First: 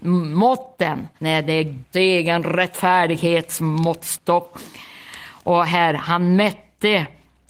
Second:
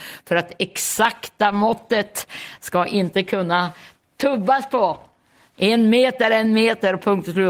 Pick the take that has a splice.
first; 2 cuts; at 1.2 s, 1.9 s

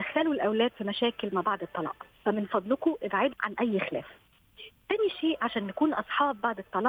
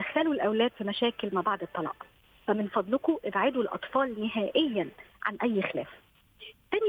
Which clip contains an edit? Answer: first; 2 cuts; at 2.1 s, 3.3 s

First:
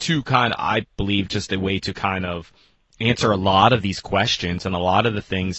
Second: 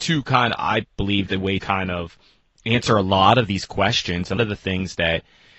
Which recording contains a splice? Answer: second; 3 cuts; at 1.3 s, 1.6 s, 4.4 s

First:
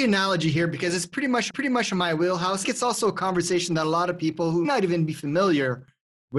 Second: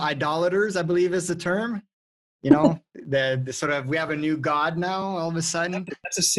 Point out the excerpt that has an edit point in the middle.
first; 3 cuts; at 1.5 s, 2.6 s, 4.6 s

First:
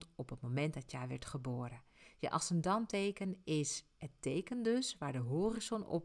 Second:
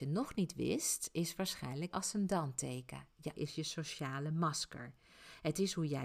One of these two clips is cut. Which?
second; 2 cuts; at 1.9 s, 3.4 s

